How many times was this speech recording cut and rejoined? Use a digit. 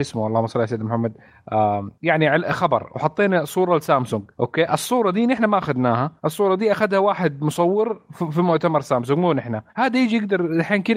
4